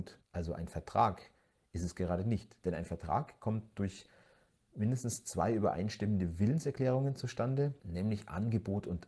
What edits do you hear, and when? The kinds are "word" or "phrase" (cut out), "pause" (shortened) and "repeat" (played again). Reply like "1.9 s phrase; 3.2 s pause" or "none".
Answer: none